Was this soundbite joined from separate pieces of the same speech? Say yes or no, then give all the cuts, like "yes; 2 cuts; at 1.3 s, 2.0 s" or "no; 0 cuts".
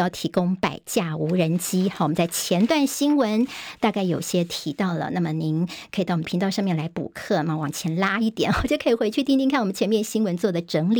yes; 1 cut; at 6.2 s